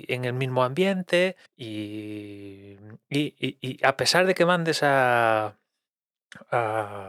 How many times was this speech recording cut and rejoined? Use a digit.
1